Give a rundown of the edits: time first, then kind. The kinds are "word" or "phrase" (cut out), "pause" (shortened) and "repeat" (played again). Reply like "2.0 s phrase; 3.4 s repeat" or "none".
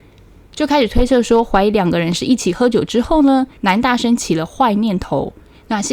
3.6 s pause